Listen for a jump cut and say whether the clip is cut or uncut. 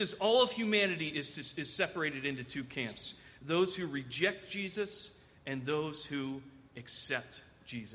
uncut